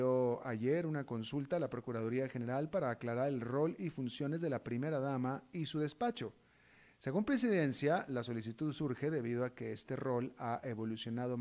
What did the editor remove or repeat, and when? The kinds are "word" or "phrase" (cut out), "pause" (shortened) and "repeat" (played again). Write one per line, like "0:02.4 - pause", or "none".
none